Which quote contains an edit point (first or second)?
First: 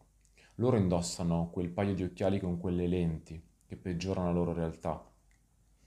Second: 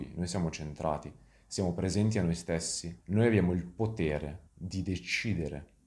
second